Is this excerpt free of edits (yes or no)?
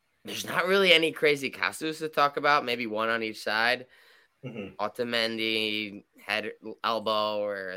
yes